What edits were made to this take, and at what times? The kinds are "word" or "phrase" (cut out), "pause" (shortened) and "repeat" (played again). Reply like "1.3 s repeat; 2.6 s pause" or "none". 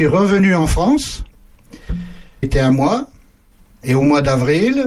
2.4 s word